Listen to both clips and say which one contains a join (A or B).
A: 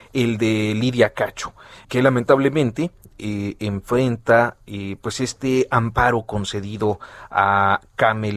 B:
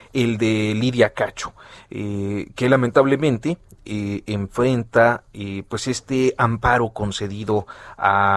A